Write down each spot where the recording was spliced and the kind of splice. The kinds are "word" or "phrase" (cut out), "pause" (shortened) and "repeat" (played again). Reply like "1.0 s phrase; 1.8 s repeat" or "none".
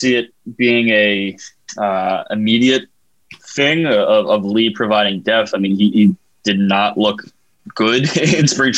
none